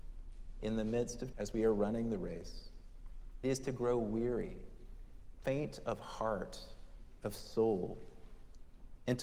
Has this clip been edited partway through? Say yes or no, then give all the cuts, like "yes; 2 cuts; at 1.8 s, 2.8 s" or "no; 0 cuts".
yes; 3 cuts; at 1.3 s, 3.4 s, 5.4 s